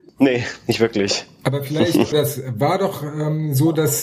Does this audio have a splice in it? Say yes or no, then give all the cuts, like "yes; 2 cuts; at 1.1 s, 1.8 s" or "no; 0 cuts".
yes; 1 cut; at 2.1 s